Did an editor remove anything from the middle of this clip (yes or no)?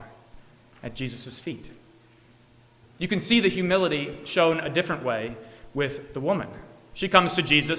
no